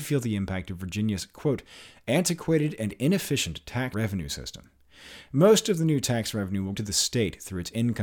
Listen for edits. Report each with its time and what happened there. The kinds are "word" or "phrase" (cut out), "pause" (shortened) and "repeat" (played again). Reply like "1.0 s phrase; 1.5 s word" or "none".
3.9 s word; 6.7 s word